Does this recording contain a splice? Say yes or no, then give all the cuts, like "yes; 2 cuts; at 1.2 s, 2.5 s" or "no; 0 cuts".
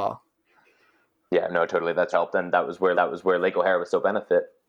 yes; 2 cuts; at 2.1 s, 2.9 s